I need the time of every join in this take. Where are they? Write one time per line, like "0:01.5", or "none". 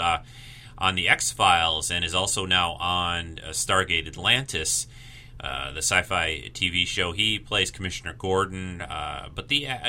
none